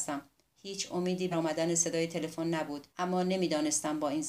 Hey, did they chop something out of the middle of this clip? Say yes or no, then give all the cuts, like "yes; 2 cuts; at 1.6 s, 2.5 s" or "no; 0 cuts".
yes; 2 cuts; at 1.3 s, 2.9 s